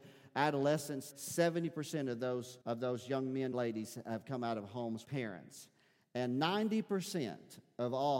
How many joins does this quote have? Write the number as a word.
four